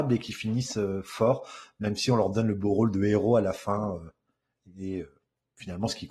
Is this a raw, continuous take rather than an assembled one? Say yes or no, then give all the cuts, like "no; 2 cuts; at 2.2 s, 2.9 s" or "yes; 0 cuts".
yes; 0 cuts